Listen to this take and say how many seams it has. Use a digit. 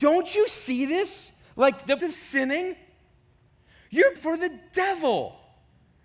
2